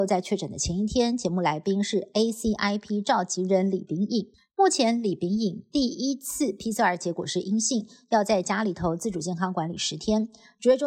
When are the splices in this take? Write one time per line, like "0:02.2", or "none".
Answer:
0:04.3

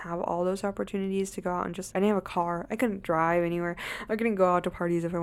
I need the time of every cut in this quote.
0:01.9

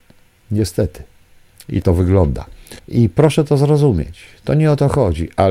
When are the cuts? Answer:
0:01.8
0:02.8

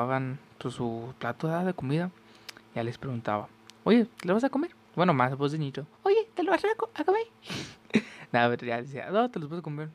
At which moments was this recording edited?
0:04.1
0:04.8
0:05.9

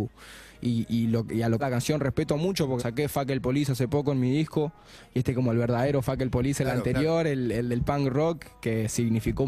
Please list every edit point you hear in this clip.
0:01.6
0:02.8

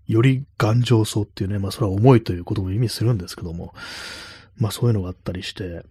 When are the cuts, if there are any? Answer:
none

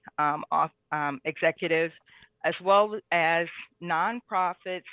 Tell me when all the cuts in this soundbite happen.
none

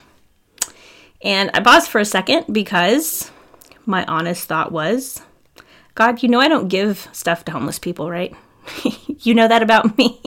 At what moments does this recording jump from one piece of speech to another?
none

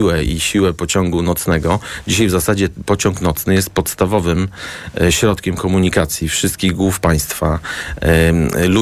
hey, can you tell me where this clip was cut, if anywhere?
none

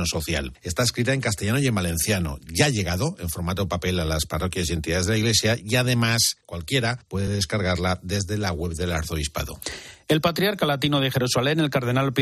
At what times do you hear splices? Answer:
none

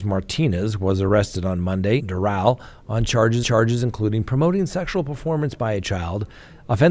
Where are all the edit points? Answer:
0:02.0
0:03.4

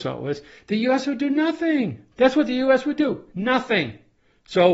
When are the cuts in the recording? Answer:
0:02.1

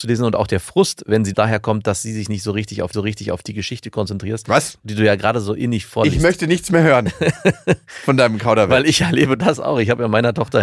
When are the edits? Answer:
0:01.3
0:02.9

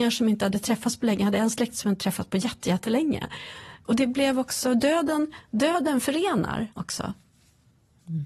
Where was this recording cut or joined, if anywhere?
0:06.7

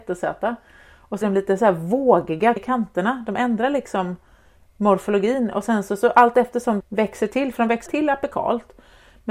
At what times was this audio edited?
0:01.2
0:02.6
0:06.8
0:07.9

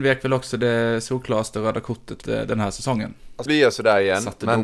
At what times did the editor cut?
0:02.2
0:03.5

